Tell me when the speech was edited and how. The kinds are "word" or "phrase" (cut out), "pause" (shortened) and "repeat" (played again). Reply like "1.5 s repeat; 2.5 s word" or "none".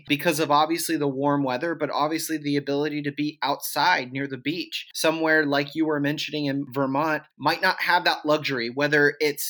none